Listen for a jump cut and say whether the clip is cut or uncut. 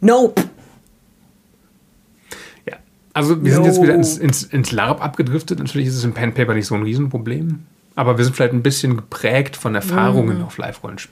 uncut